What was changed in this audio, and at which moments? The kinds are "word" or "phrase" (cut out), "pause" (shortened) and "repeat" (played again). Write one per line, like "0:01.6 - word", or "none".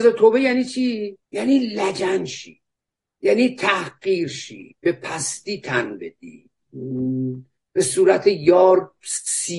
0:01.3 - pause
0:02.8 - pause
0:07.6 - pause